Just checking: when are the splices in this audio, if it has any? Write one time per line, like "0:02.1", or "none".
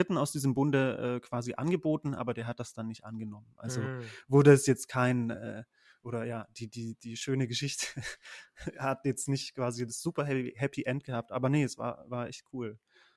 none